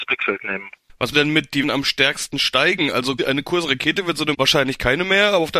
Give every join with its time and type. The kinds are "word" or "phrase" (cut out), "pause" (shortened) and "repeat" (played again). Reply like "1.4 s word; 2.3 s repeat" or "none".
1.1 s word; 1.6 s word; 3.2 s word; 4.3 s word